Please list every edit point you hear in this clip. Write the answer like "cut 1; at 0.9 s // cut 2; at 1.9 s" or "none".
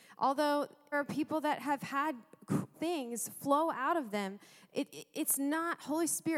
cut 1; at 0.9 s // cut 2; at 2.7 s